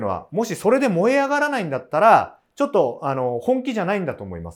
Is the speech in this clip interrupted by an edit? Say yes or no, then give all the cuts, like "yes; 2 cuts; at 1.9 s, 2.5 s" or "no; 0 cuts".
no; 0 cuts